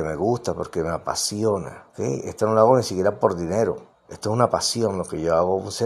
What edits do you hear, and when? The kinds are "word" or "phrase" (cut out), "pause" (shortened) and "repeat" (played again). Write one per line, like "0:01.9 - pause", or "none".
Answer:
0:01.9 - pause